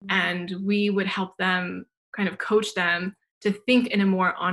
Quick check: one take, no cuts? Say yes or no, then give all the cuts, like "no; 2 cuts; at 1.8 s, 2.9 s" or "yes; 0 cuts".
yes; 0 cuts